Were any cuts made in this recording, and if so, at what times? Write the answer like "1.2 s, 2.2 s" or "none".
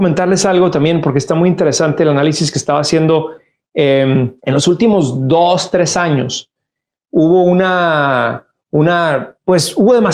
4.4 s